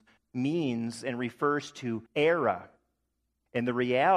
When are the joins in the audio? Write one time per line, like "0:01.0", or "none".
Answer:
0:02.1